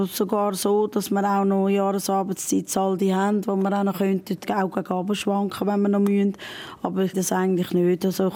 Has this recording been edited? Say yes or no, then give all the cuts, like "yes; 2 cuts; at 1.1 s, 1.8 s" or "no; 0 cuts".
yes; 1 cut; at 7.1 s